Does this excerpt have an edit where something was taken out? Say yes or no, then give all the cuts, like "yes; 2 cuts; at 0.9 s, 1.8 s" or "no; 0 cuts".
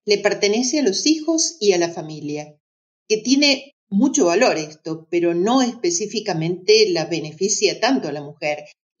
no; 0 cuts